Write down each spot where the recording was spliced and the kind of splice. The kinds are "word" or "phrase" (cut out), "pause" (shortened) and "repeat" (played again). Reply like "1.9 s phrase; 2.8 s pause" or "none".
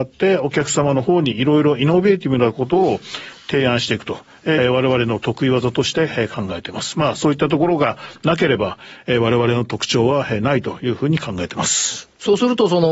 4.6 s phrase